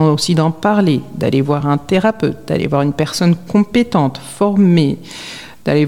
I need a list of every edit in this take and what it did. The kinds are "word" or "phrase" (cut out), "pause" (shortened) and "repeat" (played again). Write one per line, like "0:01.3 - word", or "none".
none

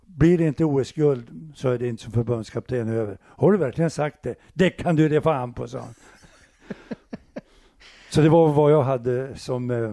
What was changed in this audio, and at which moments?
0:02.0 - word

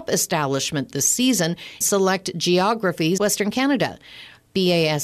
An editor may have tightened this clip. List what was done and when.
0:01.8 - word
0:03.2 - word

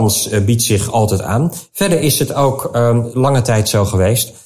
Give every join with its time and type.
none

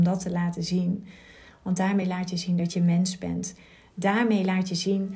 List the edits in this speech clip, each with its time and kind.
none

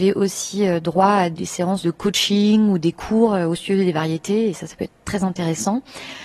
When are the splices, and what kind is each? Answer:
0:05.0 - word

